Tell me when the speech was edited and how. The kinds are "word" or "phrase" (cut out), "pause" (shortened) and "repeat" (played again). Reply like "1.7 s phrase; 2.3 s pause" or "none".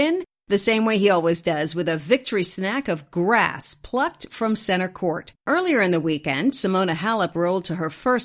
5.4 s pause